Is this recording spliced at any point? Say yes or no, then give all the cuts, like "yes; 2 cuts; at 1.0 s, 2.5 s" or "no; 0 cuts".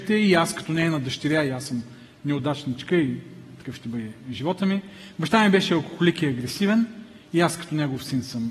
no; 0 cuts